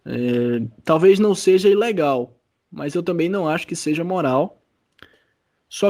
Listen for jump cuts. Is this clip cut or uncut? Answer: uncut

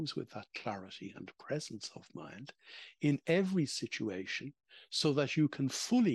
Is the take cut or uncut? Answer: uncut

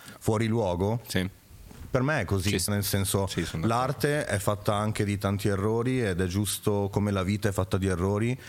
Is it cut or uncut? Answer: cut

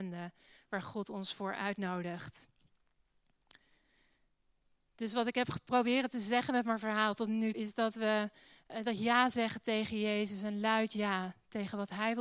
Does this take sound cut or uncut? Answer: cut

